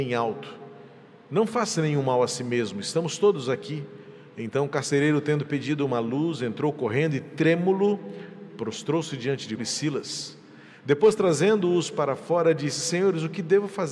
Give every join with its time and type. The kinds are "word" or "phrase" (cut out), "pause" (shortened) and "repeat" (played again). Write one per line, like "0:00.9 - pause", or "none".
0:09.6 - word